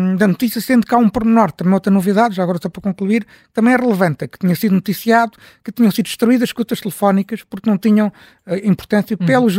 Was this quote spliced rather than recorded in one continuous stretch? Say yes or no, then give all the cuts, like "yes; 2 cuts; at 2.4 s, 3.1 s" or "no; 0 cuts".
no; 0 cuts